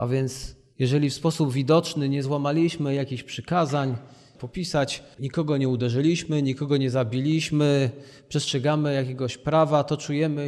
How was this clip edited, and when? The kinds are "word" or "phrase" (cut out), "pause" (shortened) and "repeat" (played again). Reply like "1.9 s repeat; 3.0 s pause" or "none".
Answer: 4.3 s phrase; 5.2 s word